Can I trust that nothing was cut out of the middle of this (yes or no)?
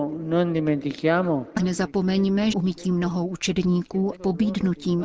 no